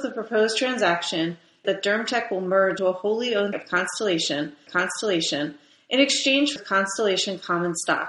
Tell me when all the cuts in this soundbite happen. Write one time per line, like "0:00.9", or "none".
0:01.6
0:02.8
0:03.5
0:04.7
0:06.6